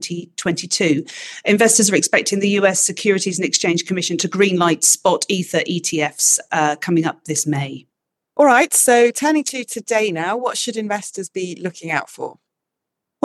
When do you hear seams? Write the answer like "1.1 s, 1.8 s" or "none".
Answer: none